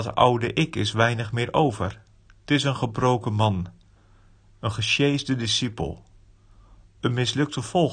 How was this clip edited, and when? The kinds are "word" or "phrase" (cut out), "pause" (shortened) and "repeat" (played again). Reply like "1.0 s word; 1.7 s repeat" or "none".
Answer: none